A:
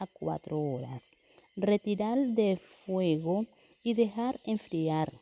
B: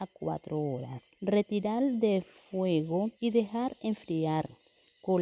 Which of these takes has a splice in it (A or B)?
B